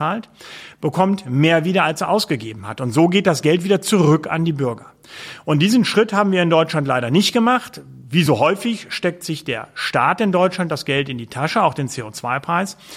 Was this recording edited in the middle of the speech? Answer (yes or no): no